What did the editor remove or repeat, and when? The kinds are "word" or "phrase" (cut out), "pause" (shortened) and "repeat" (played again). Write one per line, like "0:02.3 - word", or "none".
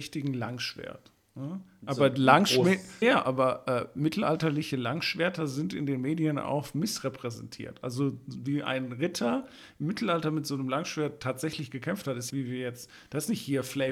0:03.0 - word
0:12.3 - phrase